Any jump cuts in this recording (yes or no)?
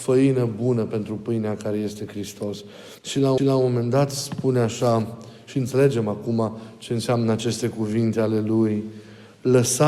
yes